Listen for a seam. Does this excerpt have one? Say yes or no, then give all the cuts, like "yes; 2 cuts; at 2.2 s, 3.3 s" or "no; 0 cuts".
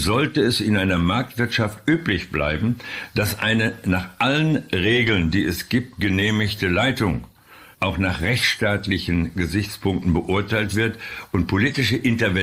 yes; 1 cut; at 7.7 s